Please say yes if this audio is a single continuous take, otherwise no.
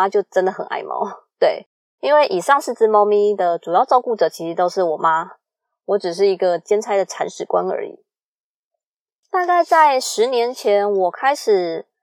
yes